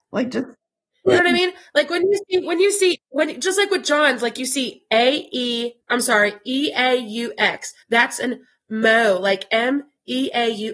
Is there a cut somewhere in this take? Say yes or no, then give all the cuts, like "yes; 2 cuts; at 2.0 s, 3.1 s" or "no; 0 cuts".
yes; 3 cuts; at 3.0 s, 5.8 s, 7.8 s